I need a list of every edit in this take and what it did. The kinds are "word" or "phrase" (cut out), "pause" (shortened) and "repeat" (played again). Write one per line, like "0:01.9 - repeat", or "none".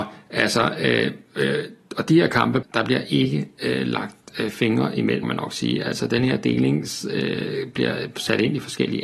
0:02.6 - word
0:05.2 - word